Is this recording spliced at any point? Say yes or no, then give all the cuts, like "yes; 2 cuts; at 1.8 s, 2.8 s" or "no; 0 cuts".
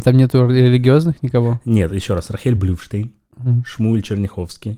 no; 0 cuts